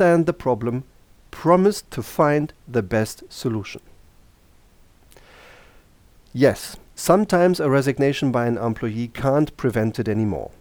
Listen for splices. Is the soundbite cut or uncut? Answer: uncut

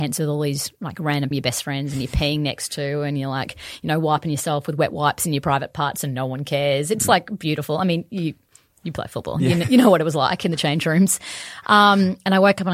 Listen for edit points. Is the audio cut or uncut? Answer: cut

